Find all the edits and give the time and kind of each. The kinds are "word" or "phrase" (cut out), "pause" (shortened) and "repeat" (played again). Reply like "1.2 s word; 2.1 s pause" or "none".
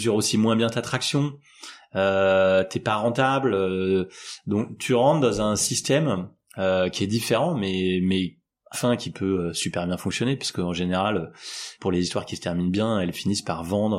8.7 s word; 11.8 s word